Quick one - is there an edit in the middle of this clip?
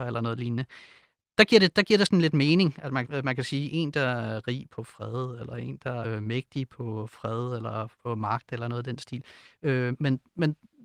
yes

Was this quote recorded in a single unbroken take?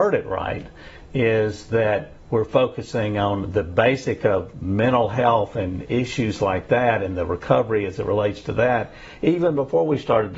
yes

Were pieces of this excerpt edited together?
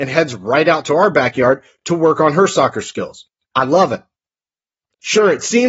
no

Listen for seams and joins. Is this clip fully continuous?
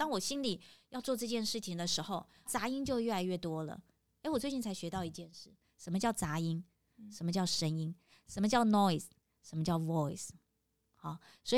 no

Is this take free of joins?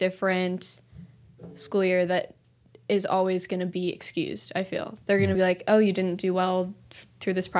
yes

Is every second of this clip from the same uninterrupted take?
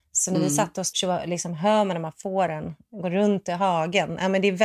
no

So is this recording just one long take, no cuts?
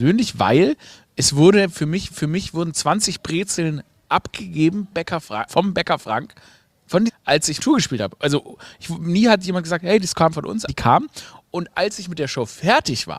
no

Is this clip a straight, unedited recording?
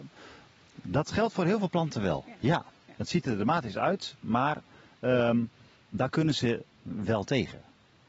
yes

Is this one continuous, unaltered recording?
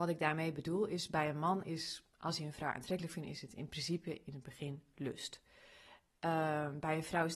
yes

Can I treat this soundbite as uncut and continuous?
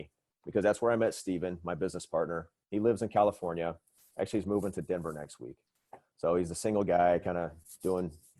yes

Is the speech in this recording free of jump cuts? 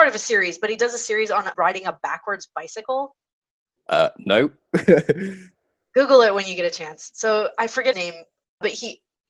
no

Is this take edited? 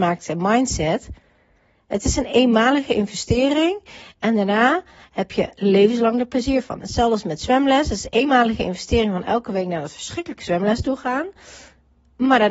no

